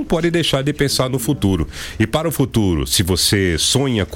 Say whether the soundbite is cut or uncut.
uncut